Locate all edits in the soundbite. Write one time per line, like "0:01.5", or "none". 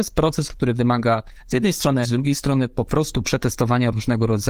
0:02.0